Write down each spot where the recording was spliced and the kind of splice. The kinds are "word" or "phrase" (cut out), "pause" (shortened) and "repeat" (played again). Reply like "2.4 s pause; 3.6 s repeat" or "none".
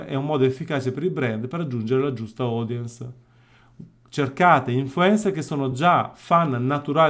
none